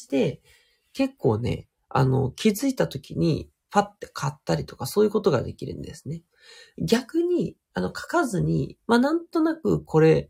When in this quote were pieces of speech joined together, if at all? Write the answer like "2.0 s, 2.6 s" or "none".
none

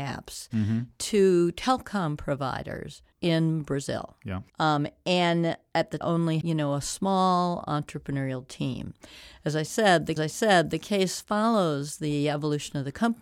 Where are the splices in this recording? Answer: 3.1 s, 4.5 s, 6.0 s, 6.4 s, 10.2 s

